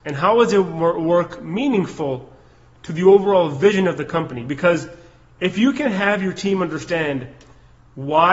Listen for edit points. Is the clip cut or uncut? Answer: uncut